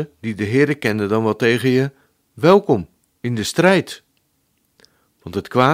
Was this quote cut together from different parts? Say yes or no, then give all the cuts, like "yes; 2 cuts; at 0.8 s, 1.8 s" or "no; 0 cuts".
no; 0 cuts